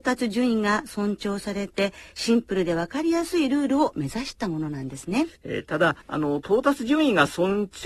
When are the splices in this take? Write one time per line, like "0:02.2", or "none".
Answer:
0:05.4
0:06.0